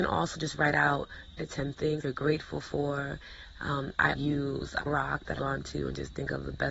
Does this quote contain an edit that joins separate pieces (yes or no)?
yes